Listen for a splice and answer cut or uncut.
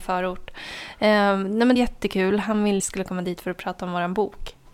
cut